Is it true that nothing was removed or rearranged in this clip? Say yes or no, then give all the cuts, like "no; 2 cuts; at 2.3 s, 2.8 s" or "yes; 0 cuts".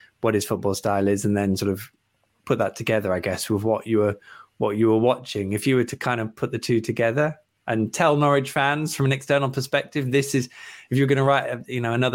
yes; 0 cuts